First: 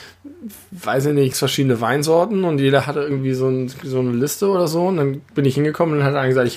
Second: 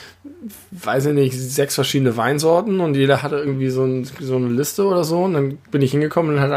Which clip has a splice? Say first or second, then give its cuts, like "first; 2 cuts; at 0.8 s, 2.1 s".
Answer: first; 1 cut; at 1.3 s